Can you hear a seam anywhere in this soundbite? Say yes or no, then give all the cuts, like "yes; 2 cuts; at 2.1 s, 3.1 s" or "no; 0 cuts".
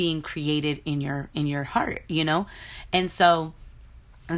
no; 0 cuts